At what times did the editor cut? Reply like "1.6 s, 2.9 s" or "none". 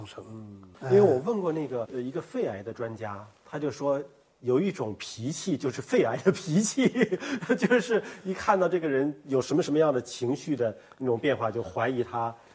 none